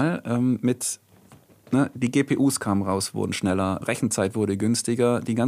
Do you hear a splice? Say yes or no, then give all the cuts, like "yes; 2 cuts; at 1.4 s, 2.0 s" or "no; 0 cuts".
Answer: yes; 1 cut; at 3.8 s